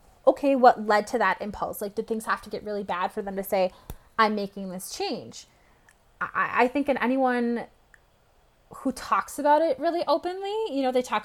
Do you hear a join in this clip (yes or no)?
no